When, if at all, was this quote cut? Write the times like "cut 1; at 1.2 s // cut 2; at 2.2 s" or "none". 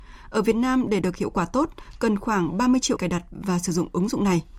cut 1; at 1.0 s // cut 2; at 3.0 s